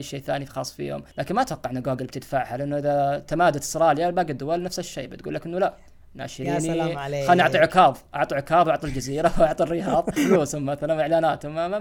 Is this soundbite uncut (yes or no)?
no